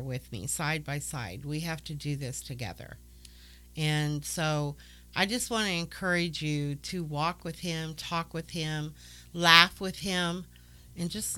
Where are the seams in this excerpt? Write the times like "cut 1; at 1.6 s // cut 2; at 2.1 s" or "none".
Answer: none